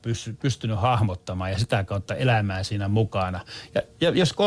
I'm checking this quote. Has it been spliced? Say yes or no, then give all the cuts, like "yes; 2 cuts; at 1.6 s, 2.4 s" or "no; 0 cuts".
no; 0 cuts